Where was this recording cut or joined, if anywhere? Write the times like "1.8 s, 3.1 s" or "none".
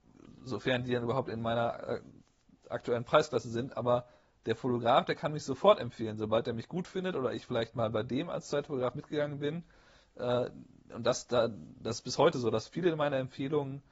none